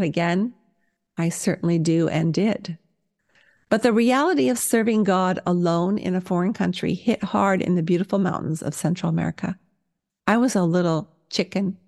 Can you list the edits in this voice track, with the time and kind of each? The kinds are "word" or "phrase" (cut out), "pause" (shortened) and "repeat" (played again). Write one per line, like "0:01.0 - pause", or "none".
none